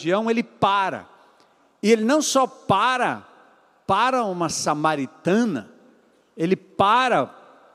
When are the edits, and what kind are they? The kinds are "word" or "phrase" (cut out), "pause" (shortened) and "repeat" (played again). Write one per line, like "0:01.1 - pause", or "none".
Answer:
none